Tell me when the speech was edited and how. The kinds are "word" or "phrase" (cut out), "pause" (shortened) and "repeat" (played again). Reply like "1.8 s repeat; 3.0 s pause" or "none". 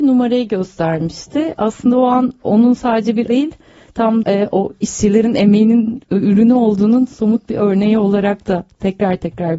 3.3 s word; 4.2 s word